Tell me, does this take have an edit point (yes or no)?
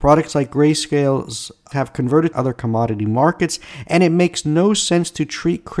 yes